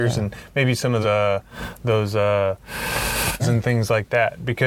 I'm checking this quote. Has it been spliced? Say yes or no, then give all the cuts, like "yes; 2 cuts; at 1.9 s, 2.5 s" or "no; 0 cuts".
yes; 2 cuts; at 1.0 s, 3.4 s